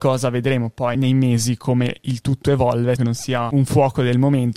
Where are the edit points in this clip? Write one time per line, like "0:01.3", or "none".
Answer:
0:00.9
0:03.0